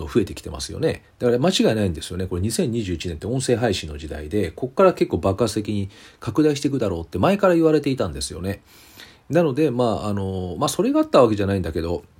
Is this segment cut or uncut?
uncut